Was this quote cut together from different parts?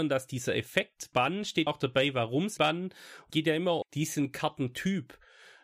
yes; 5 cuts; at 1.1 s, 1.7 s, 2.6 s, 3.3 s, 3.8 s

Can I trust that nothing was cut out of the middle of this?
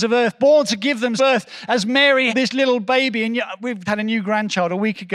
no; 3 cuts; at 1.2 s, 2.3 s, 3.9 s

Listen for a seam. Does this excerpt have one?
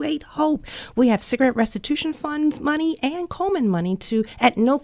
no; 0 cuts

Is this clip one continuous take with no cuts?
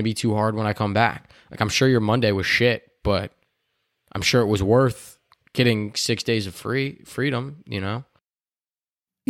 yes; 0 cuts

